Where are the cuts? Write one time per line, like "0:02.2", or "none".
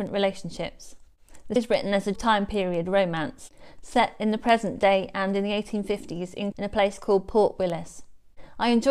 0:01.6
0:02.1
0:06.5